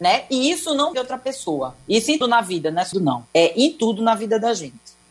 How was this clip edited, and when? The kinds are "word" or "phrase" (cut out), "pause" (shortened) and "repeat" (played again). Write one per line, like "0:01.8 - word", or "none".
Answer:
0:00.9 - phrase
0:02.2 - word
0:02.9 - phrase
0:03.3 - pause